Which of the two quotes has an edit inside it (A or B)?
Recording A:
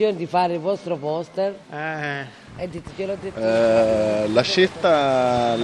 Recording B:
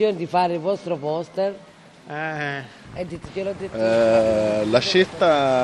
A